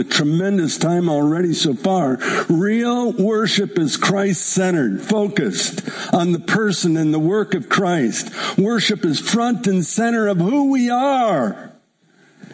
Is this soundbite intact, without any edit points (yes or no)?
yes